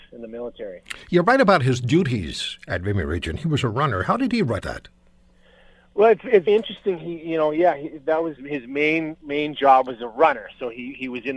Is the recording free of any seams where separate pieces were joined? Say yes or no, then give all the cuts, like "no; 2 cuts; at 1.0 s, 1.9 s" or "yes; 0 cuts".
no; 3 cuts; at 4.6 s, 6.5 s, 8.4 s